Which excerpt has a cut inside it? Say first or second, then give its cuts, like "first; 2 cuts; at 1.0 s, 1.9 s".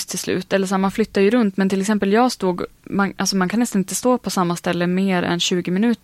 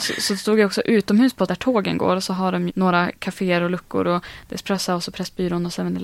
second; 2 cuts; at 1.5 s, 2.7 s